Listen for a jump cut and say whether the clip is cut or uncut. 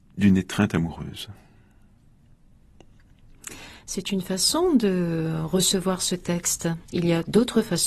cut